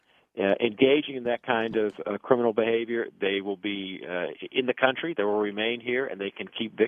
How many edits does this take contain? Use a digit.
0